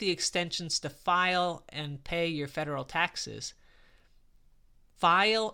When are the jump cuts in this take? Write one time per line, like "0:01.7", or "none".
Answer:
none